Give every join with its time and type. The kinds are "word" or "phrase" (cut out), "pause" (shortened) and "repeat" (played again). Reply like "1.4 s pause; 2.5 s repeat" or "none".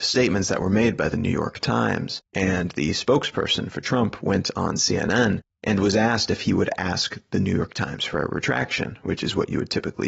2.3 s pause